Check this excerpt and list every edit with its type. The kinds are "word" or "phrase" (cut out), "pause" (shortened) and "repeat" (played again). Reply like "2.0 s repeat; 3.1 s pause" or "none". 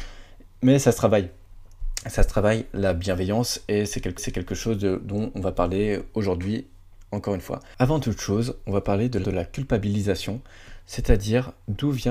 4.2 s repeat; 9.2 s word

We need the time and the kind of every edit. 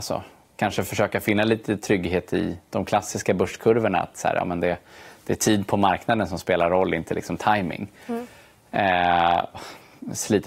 9.5 s word

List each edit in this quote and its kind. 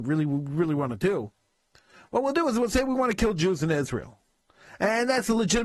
none

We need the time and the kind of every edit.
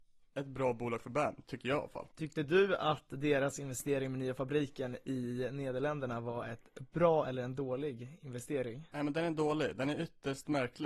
2.1 s pause

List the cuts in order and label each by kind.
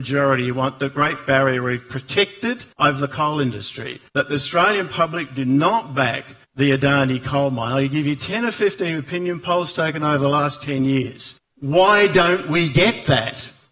2.7 s pause; 4.1 s pause; 6.4 s pause; 11.4 s pause

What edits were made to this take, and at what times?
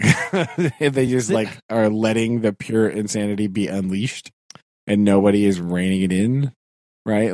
none

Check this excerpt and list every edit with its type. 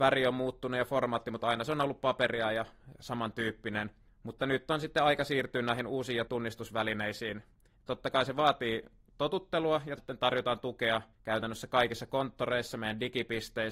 4.1 s pause; 6.3 s word; 10.0 s word; 11.1 s pause

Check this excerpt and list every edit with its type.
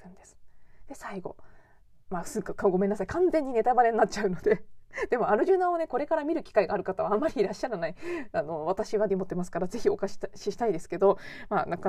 9.1 s word

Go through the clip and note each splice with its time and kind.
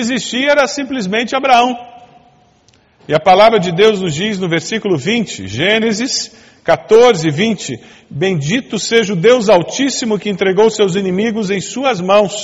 none

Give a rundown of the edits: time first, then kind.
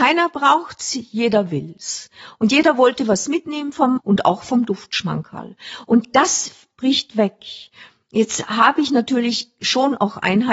4.0 s word

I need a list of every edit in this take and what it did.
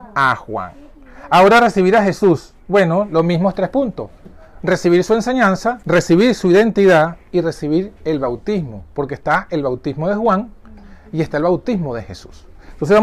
5.8 s pause; 8.0 s pause

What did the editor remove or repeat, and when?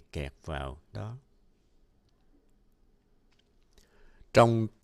0.9 s phrase

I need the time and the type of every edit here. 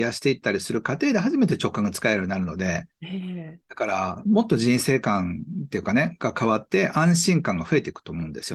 3.6 s pause

